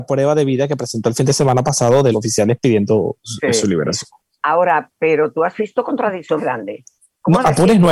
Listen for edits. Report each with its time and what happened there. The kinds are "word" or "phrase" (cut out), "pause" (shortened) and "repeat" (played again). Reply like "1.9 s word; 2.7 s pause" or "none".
2.1 s word; 6.4 s word